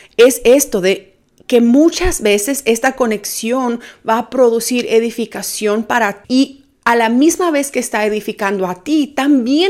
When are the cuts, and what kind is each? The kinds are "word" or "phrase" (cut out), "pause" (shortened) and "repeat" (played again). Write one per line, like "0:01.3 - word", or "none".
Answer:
0:06.2 - word